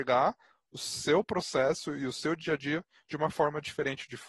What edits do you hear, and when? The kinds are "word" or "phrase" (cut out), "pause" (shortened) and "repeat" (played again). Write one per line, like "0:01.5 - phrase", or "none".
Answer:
none